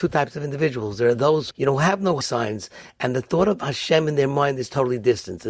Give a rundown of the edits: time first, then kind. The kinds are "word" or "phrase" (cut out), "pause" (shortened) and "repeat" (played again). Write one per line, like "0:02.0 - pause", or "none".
0:01.5 - word
0:02.2 - word